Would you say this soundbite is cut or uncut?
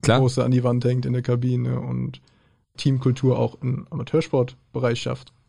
cut